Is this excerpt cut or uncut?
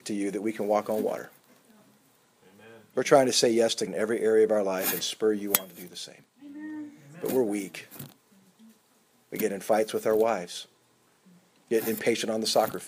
cut